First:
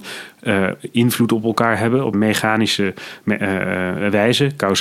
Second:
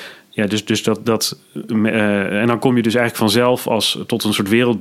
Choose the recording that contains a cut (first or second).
first